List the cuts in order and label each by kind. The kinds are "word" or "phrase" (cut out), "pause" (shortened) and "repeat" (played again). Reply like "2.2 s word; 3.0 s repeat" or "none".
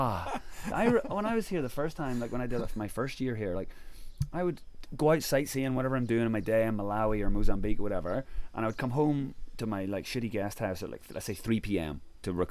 none